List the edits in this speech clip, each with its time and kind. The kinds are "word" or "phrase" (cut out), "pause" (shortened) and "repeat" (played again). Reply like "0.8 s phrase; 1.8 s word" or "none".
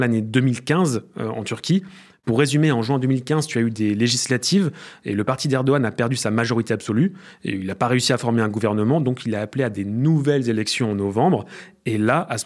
none